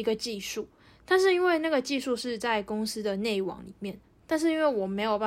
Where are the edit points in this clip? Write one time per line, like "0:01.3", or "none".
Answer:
0:04.0